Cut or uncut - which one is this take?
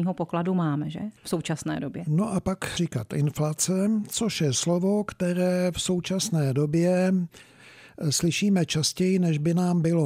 cut